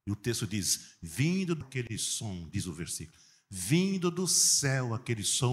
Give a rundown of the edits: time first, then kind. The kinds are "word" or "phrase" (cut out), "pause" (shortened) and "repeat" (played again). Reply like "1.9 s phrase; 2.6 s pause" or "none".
1.6 s word